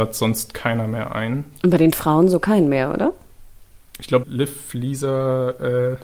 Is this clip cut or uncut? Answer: cut